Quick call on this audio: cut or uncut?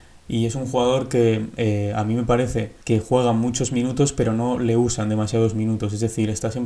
cut